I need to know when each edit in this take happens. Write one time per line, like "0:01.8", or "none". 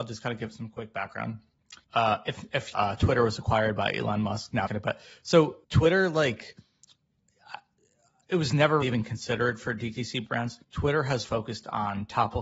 0:01.8
0:02.7
0:04.7
0:05.6
0:08.8
0:10.3
0:10.6
0:11.2